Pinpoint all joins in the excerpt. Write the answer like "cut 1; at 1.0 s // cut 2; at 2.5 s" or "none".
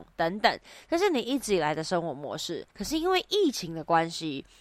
cut 1; at 2.7 s